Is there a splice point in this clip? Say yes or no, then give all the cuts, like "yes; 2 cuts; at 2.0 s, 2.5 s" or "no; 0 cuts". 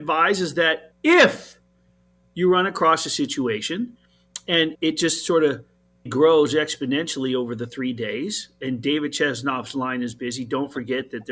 yes; 3 cuts; at 0.9 s, 4.8 s, 6.1 s